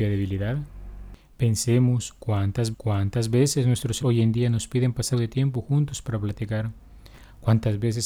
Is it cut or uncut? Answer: cut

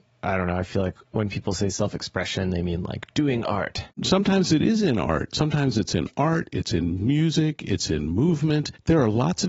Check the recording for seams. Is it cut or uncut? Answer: cut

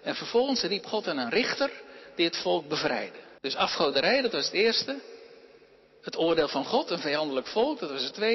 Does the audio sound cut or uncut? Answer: cut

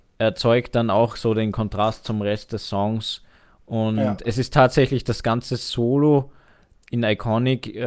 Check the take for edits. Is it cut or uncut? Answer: uncut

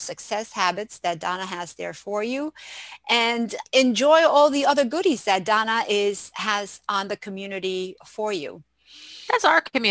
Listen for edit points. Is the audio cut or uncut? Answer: cut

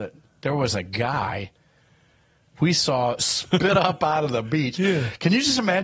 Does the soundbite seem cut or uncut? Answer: uncut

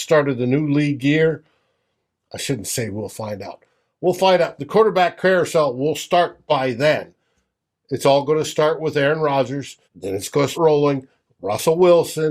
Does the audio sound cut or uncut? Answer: cut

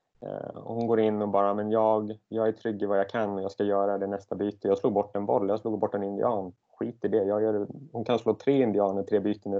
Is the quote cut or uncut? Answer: cut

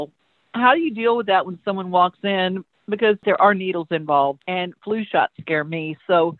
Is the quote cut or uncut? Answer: uncut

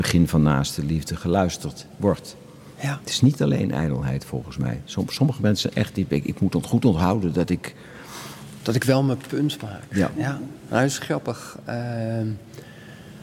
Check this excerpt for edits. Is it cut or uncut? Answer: uncut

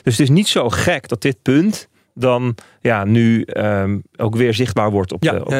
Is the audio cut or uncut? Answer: uncut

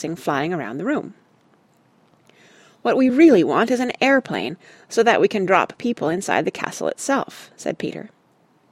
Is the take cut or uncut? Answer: uncut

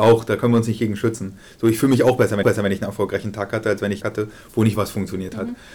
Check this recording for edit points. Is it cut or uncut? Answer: cut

